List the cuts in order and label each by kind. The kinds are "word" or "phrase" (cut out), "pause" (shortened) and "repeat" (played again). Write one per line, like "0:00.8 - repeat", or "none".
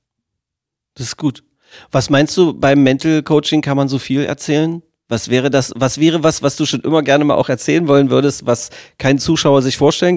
none